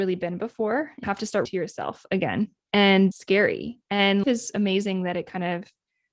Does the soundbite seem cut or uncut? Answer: cut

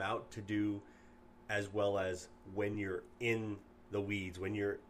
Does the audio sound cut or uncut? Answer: uncut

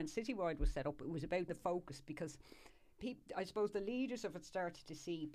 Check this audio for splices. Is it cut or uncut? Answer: cut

